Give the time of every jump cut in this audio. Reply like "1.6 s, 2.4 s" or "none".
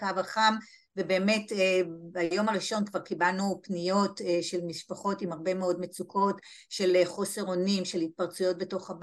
none